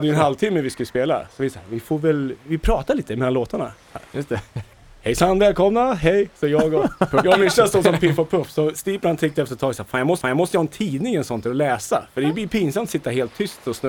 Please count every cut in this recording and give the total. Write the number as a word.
one